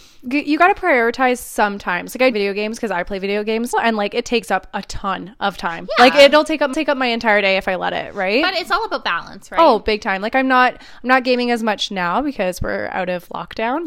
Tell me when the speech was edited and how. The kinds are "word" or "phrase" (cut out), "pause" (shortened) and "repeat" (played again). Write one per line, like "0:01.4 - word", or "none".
0:02.3 - phrase
0:03.7 - word
0:06.7 - repeat